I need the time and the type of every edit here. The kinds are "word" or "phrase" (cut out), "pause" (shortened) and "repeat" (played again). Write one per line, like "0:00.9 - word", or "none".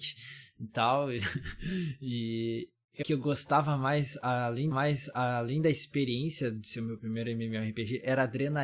0:03.0 - word
0:04.7 - repeat